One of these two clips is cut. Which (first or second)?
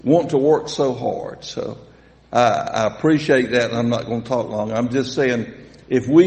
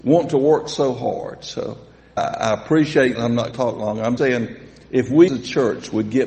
second